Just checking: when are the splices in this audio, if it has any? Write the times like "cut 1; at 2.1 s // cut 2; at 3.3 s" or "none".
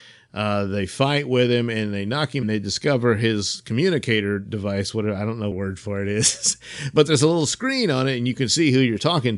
cut 1; at 2.4 s // cut 2; at 5.5 s